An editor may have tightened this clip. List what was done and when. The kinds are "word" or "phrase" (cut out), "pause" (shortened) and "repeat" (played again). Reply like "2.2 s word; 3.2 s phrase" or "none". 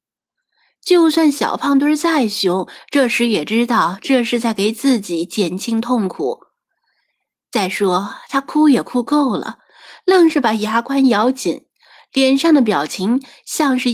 none